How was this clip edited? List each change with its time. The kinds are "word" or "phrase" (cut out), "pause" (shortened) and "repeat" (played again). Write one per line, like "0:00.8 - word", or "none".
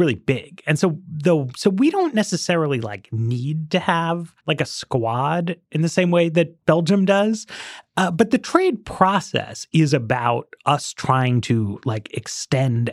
0:04.4 - pause
0:06.6 - pause